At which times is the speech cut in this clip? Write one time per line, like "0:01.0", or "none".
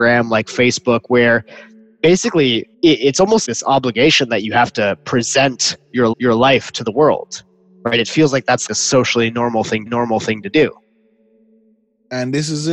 0:02.7
0:03.4
0:06.1
0:08.7
0:09.9